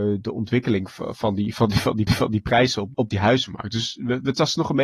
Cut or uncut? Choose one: cut